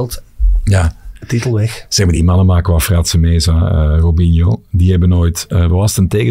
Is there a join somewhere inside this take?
no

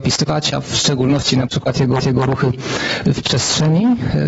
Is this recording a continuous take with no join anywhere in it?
no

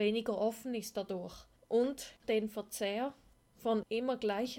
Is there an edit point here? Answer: yes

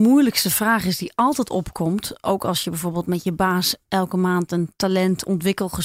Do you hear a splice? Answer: no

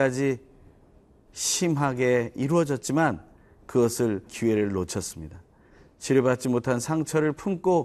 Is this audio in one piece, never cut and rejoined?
no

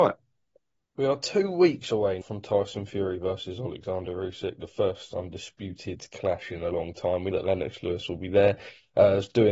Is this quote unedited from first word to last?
no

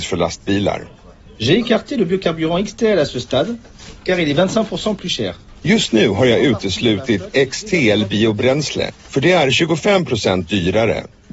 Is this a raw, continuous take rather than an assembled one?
yes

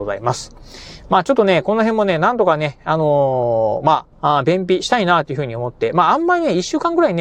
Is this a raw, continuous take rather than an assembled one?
no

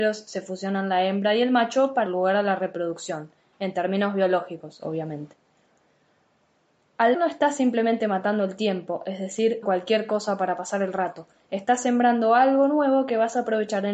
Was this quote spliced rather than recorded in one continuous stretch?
yes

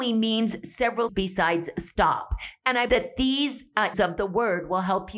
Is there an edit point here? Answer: yes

